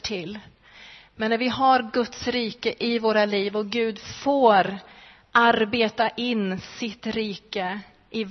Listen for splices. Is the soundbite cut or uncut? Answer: uncut